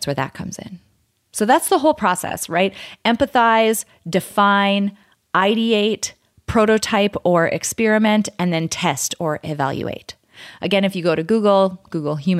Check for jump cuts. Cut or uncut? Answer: uncut